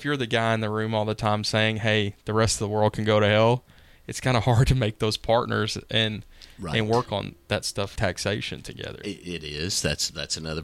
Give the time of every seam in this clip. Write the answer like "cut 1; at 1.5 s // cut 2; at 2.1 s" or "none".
cut 1; at 8.0 s